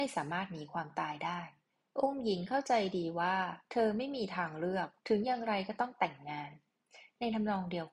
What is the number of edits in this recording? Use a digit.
2